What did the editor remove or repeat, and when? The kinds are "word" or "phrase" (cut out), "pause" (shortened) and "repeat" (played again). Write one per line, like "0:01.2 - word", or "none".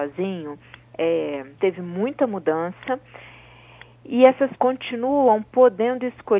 0:01.6 - word
0:04.6 - word